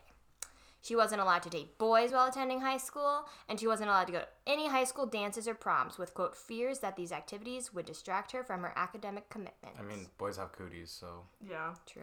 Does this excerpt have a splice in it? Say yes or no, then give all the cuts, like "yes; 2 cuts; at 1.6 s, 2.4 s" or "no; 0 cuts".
no; 0 cuts